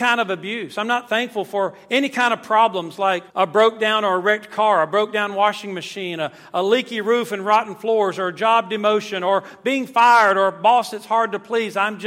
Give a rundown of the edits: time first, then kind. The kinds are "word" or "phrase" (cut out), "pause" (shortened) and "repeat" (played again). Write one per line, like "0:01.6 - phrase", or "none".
0:03.3 - pause